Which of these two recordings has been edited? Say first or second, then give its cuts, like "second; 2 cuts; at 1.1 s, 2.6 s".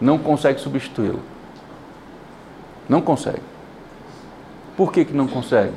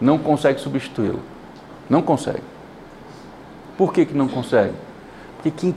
second; 1 cut; at 1.8 s